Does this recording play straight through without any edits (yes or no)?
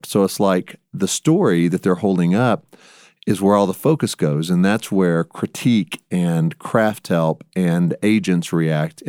yes